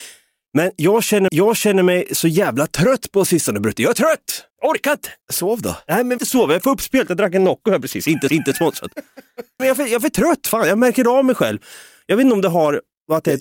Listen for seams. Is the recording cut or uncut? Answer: cut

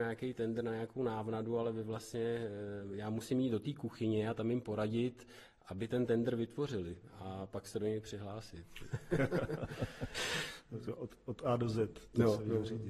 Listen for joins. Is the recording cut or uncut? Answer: uncut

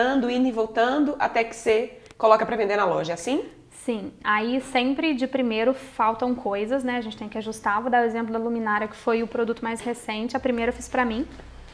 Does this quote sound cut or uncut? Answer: uncut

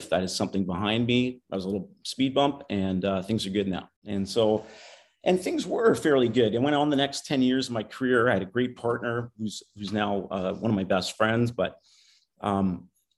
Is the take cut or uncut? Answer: cut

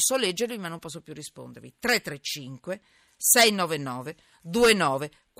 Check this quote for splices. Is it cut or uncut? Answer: uncut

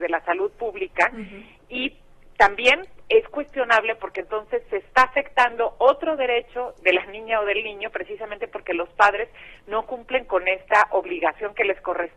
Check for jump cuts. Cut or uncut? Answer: uncut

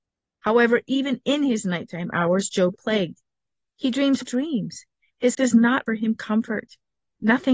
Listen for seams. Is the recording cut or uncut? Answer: cut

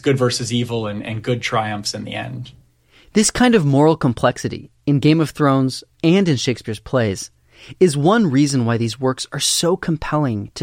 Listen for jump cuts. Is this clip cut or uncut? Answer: uncut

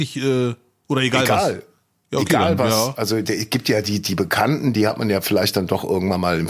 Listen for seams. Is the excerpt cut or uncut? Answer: uncut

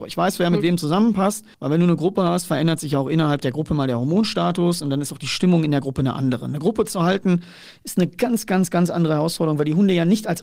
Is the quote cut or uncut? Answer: cut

